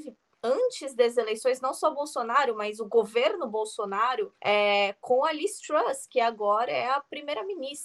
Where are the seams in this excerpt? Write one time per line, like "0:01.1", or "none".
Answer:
0:04.4